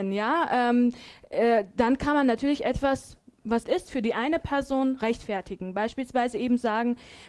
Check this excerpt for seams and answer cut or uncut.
cut